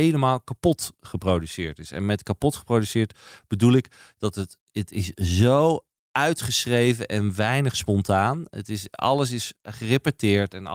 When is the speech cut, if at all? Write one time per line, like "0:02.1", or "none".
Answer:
none